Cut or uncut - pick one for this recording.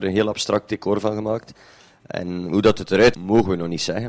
cut